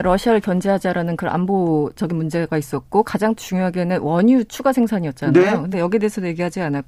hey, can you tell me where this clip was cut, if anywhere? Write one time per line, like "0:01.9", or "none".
none